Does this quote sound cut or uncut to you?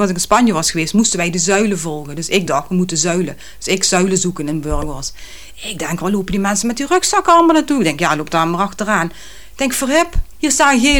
uncut